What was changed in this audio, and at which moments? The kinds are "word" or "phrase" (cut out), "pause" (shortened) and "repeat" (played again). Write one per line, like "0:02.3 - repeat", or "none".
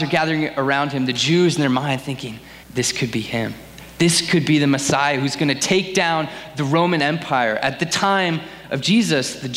0:02.6 - pause